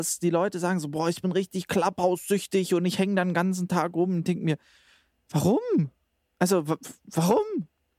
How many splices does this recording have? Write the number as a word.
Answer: zero